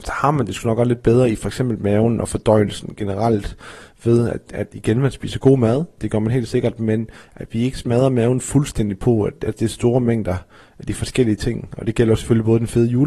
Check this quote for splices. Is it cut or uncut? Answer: uncut